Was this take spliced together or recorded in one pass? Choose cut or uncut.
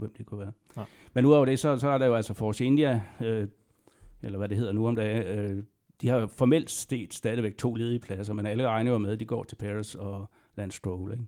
uncut